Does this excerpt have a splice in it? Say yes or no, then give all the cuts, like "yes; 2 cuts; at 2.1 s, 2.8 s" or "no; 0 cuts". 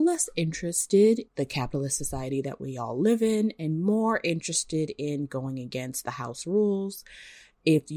yes; 1 cut; at 1.3 s